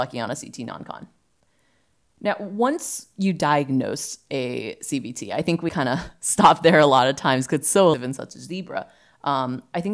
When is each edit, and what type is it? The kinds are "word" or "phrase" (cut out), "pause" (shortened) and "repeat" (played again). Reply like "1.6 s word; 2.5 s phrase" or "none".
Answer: 5.7 s word; 7.9 s word